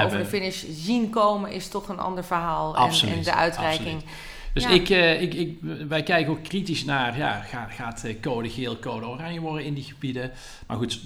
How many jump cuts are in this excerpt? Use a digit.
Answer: 0